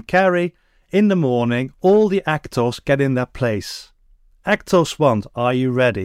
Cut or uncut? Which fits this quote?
uncut